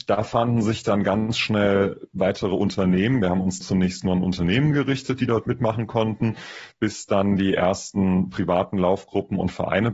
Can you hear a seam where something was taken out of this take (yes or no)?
yes